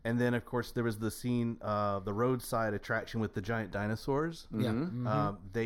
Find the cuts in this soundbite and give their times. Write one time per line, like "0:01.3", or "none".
none